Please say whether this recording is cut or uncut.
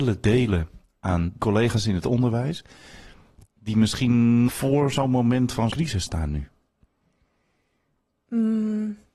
cut